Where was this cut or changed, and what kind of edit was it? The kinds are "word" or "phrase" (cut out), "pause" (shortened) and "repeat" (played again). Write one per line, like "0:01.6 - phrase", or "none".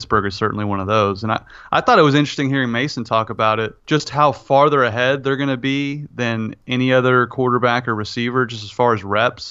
0:03.8 - pause